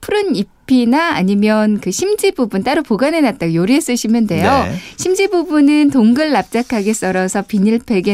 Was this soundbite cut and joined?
no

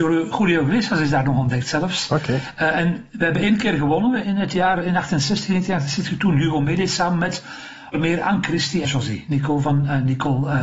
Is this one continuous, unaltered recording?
no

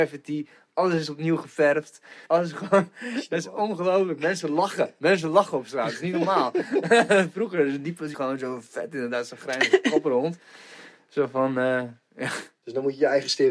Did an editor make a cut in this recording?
yes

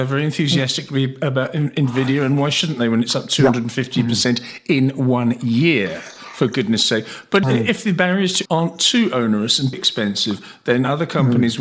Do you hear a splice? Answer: yes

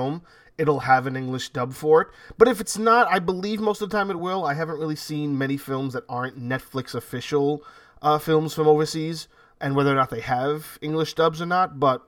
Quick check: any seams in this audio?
no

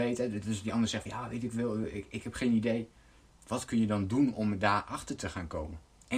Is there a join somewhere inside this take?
no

